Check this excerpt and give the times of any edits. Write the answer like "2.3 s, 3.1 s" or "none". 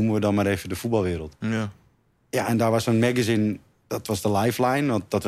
none